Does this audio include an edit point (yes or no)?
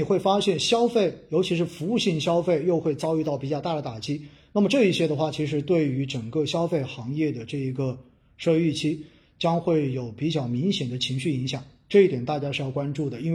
no